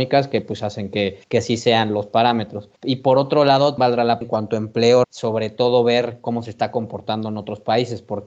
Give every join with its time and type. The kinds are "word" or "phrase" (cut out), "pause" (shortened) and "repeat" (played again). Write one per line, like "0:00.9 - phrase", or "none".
0:01.2 - pause
0:02.8 - pause
0:03.8 - word
0:04.2 - word
0:05.0 - word